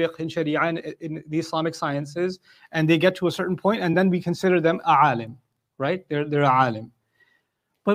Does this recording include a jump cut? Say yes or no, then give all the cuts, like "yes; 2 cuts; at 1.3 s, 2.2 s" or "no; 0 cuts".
no; 0 cuts